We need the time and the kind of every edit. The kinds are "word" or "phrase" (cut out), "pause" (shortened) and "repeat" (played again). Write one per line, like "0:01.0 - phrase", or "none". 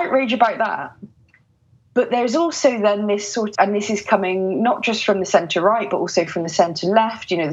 0:03.5 - word